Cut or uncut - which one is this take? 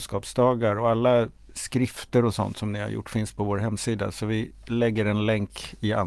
uncut